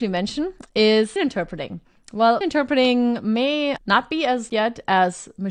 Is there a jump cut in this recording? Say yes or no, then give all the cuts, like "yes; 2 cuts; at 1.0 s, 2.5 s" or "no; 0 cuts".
yes; 4 cuts; at 1.2 s, 2.4 s, 3.8 s, 4.5 s